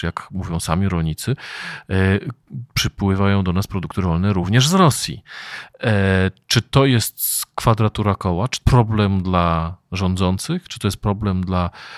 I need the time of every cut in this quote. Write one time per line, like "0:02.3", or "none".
0:08.6